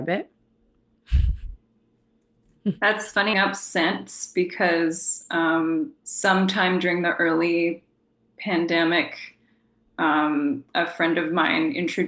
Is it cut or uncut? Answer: cut